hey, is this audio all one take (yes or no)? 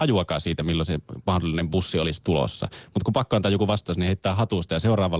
yes